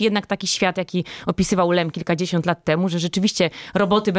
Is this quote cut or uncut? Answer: uncut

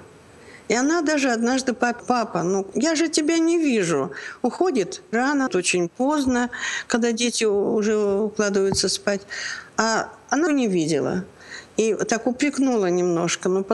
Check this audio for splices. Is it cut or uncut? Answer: cut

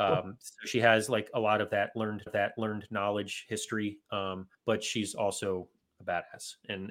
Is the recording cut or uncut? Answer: cut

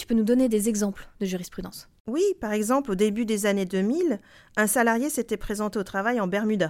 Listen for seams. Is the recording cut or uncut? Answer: uncut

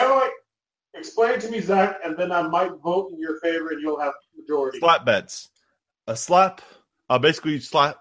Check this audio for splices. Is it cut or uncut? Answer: uncut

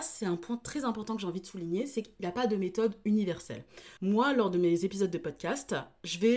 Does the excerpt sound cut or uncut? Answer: cut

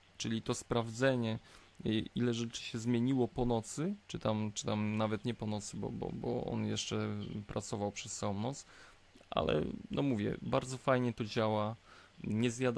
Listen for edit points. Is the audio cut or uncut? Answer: cut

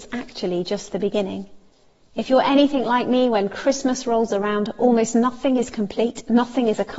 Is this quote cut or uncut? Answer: uncut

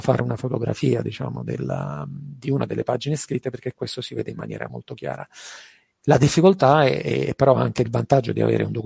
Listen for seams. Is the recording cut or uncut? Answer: cut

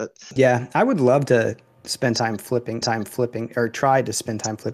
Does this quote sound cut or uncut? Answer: cut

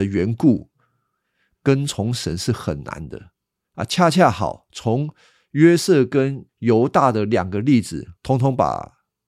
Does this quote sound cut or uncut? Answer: cut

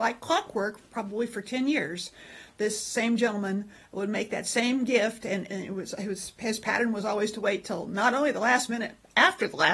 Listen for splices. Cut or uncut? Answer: uncut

